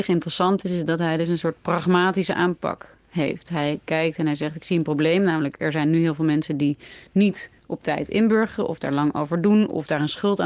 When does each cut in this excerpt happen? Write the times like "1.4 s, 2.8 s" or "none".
none